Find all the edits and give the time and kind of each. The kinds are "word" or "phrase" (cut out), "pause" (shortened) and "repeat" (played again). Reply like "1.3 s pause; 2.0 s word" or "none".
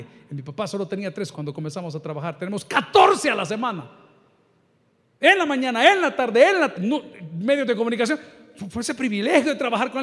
1.3 s word; 6.7 s word